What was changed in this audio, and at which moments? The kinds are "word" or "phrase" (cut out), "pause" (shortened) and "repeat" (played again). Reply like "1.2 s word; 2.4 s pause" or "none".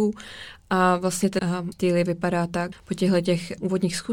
1.4 s word; 1.7 s phrase; 2.7 s word